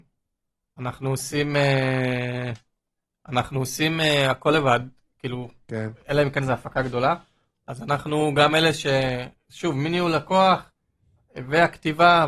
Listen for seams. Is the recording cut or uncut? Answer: uncut